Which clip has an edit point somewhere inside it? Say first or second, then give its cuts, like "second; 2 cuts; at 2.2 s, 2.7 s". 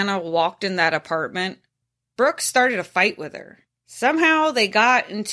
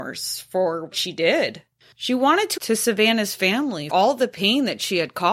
second; 3 cuts; at 0.9 s, 2.6 s, 3.9 s